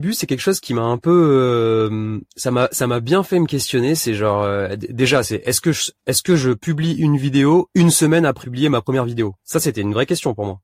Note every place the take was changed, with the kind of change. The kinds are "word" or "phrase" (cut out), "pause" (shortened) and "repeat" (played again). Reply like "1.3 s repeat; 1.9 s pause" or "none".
2.3 s pause; 6.0 s pause; 8.4 s word